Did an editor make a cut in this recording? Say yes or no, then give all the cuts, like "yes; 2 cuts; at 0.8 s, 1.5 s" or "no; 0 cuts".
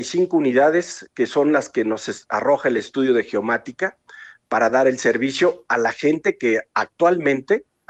no; 0 cuts